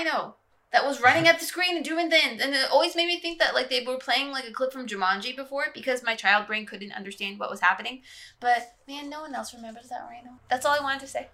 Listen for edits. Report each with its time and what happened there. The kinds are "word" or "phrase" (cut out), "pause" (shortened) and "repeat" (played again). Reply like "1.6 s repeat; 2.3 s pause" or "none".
10.4 s pause